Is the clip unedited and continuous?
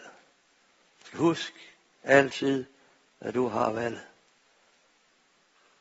yes; 0 cuts

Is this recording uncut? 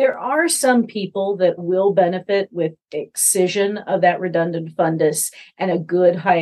no; 1 cut; at 1.6 s

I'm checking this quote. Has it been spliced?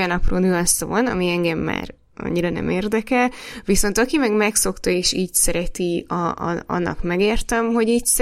no; 0 cuts

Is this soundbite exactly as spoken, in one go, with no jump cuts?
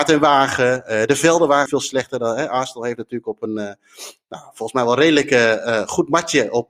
no; 1 cut; at 1.7 s

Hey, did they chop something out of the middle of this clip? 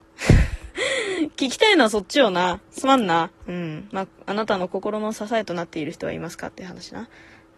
yes; 1 cut; at 3.3 s

